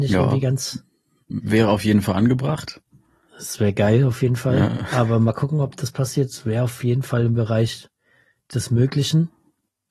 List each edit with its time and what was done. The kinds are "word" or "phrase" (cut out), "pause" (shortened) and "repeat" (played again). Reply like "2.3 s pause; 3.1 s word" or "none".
none